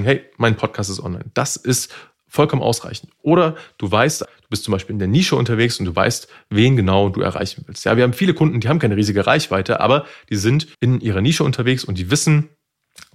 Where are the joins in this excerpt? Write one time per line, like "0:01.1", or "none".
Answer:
0:04.2
0:10.7